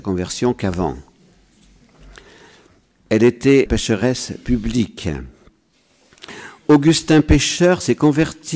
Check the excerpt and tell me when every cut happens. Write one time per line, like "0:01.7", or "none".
0:03.7